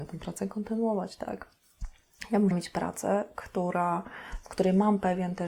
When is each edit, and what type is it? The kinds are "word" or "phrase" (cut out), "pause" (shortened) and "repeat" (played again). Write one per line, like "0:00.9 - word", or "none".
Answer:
0:02.5 - word

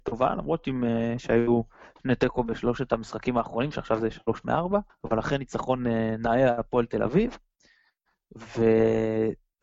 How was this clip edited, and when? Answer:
0:04.9 - pause

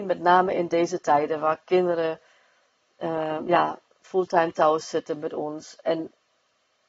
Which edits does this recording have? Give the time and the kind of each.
none

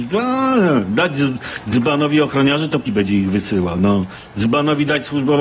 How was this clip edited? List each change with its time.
0:02.9 - word

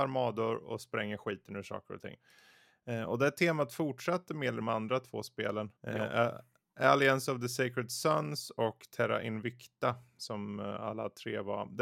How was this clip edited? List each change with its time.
0:04.6 - phrase
0:05.8 - pause

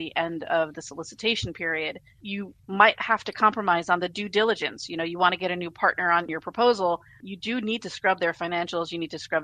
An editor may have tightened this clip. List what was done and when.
none

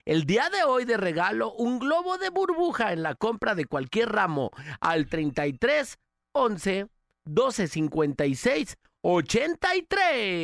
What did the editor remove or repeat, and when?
none

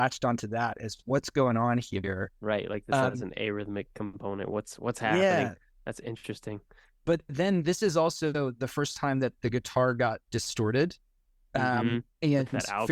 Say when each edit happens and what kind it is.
none

